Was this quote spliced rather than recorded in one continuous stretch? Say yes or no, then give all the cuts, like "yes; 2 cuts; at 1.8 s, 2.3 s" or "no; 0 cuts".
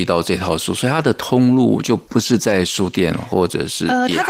yes; 1 cut; at 2.1 s